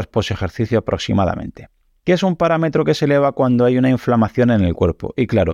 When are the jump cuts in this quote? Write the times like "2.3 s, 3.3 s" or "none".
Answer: none